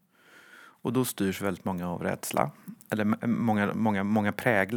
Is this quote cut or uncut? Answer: uncut